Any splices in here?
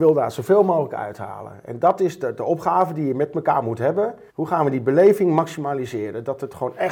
yes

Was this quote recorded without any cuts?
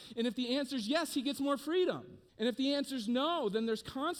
no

